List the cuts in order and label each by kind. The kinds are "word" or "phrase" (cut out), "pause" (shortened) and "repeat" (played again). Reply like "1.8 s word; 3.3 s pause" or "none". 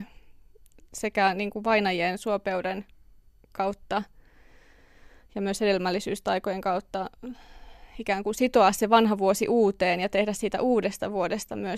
none